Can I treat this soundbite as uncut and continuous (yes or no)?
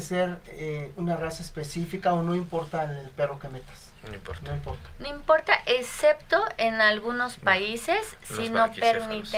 yes